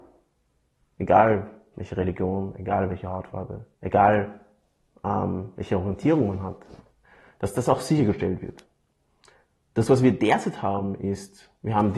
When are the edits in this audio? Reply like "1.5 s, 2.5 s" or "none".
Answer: 3.7 s